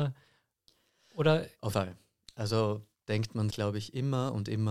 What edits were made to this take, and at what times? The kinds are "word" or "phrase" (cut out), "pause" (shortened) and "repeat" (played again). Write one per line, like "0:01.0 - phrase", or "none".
0:01.7 - word
0:02.9 - pause
0:03.5 - word

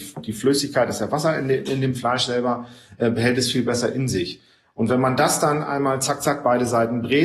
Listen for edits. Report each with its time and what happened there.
none

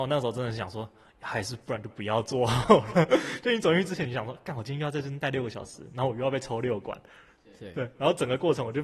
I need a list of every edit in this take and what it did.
none

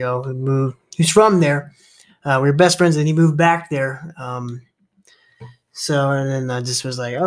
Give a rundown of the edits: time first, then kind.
none

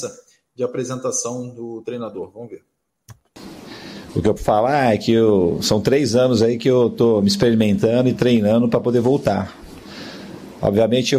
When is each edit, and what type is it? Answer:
0:04.4 - word

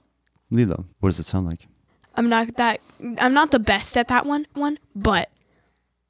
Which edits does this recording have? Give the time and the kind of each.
0:00.9 - pause
0:01.9 - pause
0:04.5 - repeat

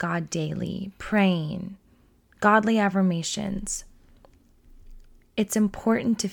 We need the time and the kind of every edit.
none

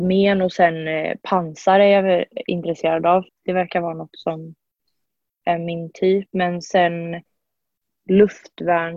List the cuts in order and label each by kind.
0:03.3 - word

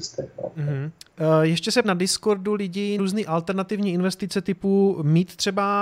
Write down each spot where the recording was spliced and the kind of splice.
0:01.8 - word
0:03.0 - word

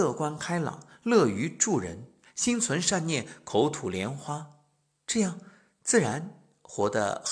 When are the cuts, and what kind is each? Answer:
none

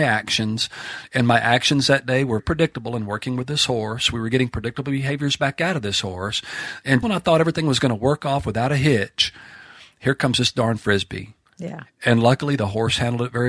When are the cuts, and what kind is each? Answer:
0:02.4 - word
0:07.0 - word

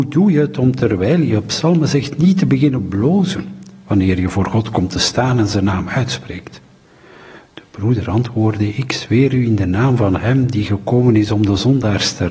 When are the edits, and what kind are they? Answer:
none

